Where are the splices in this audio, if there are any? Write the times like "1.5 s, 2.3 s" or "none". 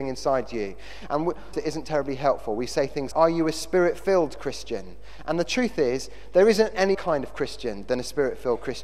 1.5 s, 3.1 s, 6.9 s